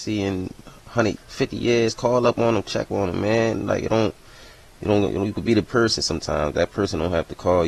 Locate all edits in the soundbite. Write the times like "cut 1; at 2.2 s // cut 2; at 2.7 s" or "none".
cut 1; at 1.2 s // cut 2; at 2.9 s // cut 3; at 5.6 s

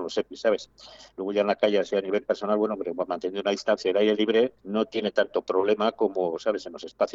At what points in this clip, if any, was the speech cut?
cut 1; at 1.1 s // cut 2; at 4.6 s

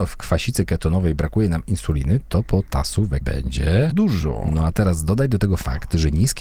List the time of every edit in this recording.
cut 1; at 3.2 s // cut 2; at 3.9 s

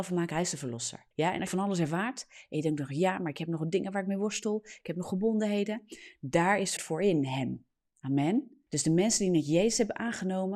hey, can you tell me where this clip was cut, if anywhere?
cut 1; at 1.1 s // cut 2; at 1.5 s // cut 3; at 6.8 s // cut 4; at 8.7 s

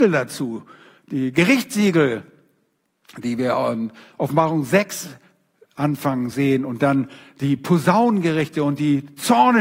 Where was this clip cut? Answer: none

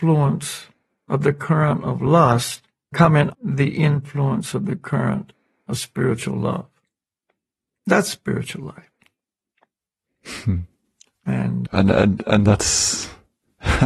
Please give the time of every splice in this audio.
cut 1; at 2.9 s // cut 2; at 3.3 s // cut 3; at 11.7 s

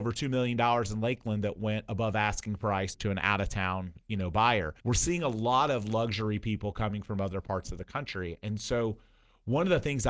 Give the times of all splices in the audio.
cut 1; at 2.9 s // cut 2; at 4.8 s

